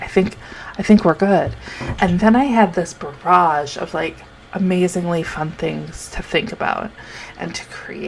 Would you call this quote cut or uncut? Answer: uncut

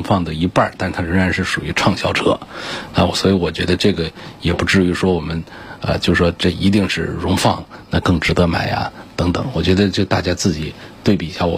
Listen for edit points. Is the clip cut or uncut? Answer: uncut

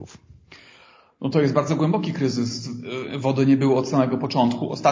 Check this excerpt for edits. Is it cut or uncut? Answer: uncut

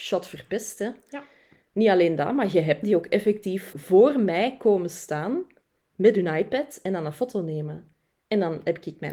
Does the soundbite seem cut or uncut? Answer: cut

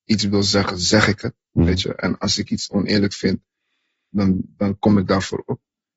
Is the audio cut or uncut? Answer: uncut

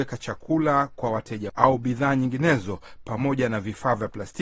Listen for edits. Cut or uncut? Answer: cut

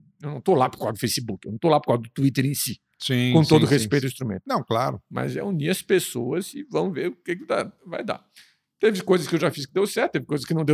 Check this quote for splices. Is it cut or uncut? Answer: uncut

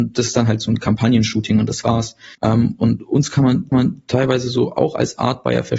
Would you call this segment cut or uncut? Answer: cut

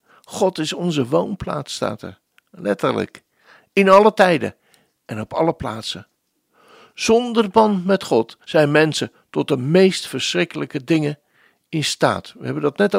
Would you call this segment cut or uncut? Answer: cut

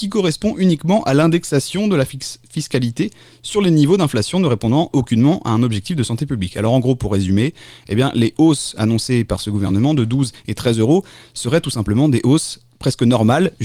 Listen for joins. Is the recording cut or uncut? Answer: uncut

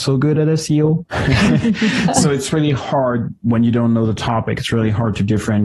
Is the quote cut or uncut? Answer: uncut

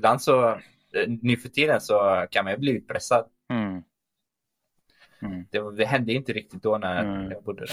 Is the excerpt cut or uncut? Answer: uncut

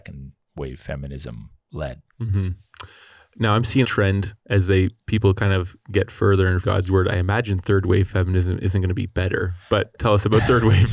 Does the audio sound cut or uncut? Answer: cut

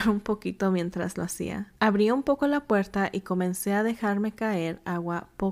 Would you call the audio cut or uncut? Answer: cut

